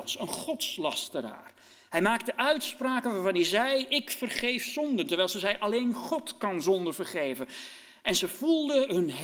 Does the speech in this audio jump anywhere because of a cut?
no; 0 cuts

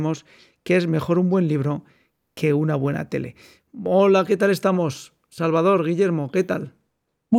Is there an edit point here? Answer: no; 0 cuts

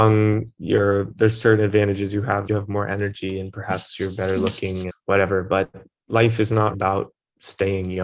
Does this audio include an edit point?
yes; 3 cuts; at 2.5 s, 4.9 s, 6.7 s

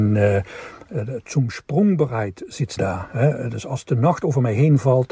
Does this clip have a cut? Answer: yes; 1 cut; at 2.8 s

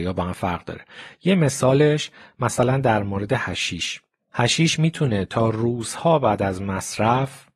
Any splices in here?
no; 0 cuts

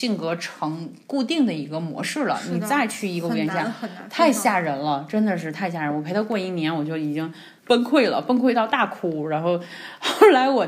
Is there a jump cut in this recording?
yes; 1 cut; at 7.6 s

